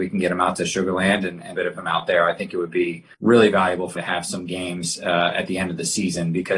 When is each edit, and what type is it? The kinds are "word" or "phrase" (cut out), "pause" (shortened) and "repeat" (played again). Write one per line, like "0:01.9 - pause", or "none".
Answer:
0:01.5 - phrase
0:03.1 - pause
0:03.9 - word